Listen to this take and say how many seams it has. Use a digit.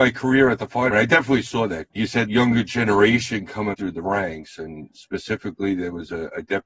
4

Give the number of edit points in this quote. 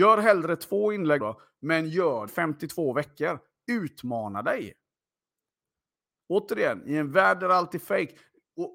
2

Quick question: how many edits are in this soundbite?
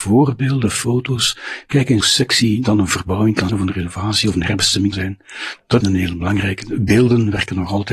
4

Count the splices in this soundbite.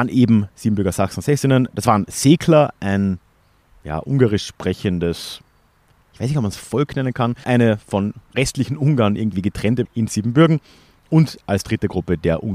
2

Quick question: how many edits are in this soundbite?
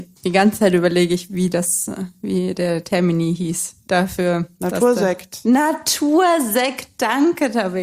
1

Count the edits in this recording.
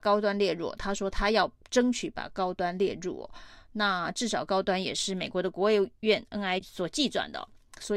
1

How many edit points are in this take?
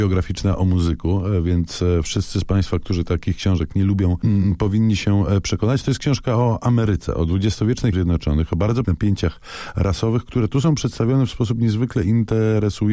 2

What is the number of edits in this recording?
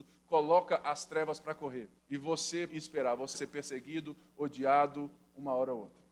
3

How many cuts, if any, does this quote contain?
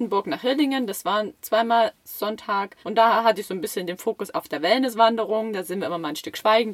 1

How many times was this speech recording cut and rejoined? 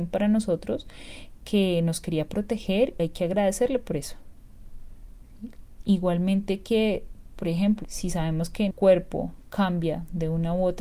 3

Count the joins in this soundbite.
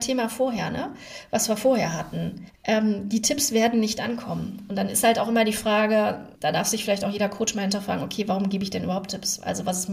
2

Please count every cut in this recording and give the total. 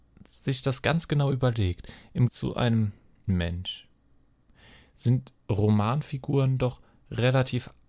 3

